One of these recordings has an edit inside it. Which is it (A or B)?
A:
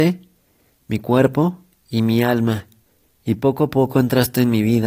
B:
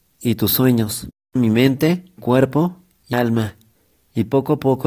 B